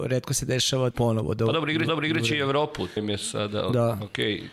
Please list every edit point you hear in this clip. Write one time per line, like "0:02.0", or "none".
0:00.9
0:01.9
0:03.0